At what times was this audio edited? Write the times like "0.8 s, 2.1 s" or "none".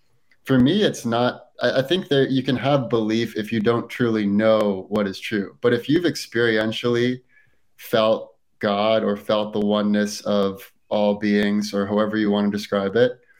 none